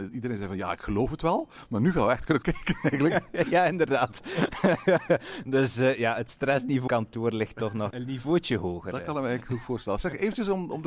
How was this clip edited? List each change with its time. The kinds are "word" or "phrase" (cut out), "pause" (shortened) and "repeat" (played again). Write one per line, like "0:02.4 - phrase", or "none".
0:02.4 - word
0:06.9 - word
0:07.9 - word